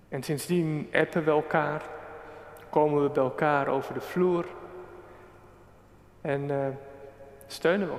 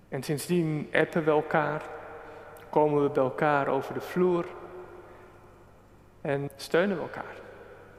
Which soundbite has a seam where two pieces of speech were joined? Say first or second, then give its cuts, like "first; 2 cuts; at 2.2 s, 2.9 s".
second; 1 cut; at 6.5 s